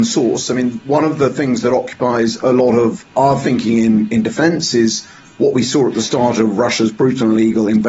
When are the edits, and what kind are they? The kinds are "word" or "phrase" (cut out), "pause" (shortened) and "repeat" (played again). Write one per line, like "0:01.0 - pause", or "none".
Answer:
none

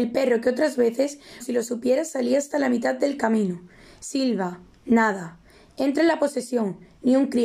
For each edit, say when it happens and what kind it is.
0:01.4 - word

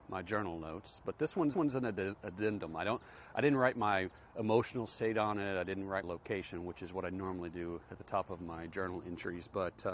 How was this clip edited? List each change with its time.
0:01.5 - repeat
0:06.0 - word

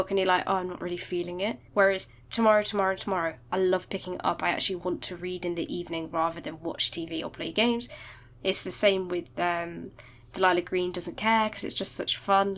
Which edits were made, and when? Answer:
0:01.7 - pause

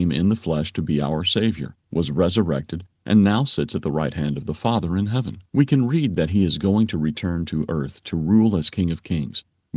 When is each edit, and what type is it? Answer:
0:05.5 - pause

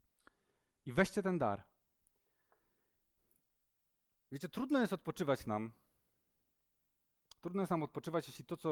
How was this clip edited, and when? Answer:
none

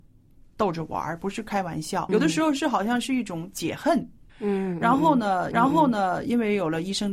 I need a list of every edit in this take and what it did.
0:02.1 - word
0:04.3 - pause
0:05.5 - repeat

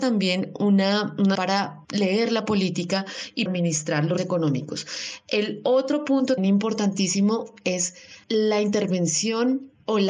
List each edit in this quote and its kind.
0:01.3 - word
0:01.8 - pause
0:03.5 - word
0:04.2 - word
0:06.4 - word
0:08.2 - pause

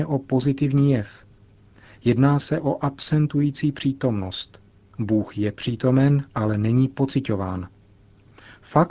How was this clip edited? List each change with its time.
none

